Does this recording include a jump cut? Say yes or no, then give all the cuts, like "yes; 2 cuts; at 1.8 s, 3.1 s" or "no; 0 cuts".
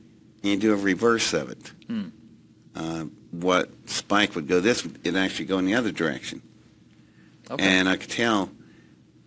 yes; 1 cut; at 4.8 s